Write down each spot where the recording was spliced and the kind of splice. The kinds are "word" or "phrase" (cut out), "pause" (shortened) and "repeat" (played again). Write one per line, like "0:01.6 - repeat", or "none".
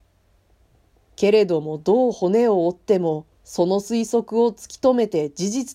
0:03.3 - pause